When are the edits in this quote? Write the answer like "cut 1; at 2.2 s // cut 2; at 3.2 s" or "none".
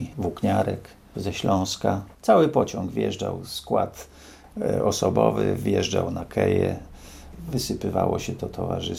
cut 1; at 1.1 s // cut 2; at 2.1 s